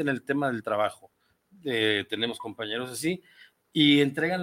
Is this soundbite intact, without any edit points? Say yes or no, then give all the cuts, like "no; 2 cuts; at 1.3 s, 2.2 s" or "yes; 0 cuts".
yes; 0 cuts